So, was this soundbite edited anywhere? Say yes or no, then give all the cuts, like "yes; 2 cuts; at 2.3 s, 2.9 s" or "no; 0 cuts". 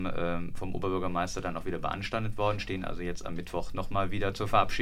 no; 0 cuts